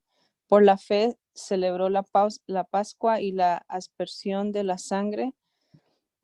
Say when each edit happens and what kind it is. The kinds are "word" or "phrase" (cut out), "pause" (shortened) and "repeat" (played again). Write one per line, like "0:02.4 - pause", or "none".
0:01.2 - pause